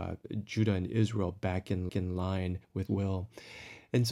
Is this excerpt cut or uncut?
cut